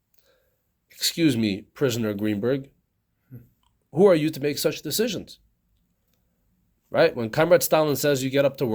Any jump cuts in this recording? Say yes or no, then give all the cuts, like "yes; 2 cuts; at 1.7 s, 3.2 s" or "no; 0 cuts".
no; 0 cuts